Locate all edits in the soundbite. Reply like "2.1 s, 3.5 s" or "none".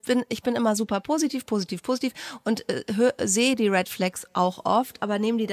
none